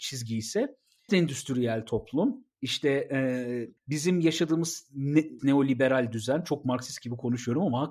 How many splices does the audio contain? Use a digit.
4